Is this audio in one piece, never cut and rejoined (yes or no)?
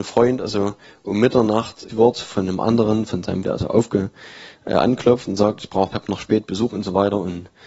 no